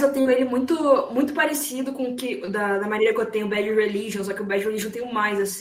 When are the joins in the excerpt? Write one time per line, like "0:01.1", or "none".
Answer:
none